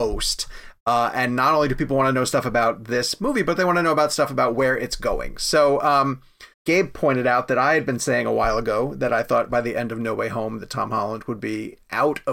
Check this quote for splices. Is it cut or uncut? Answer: cut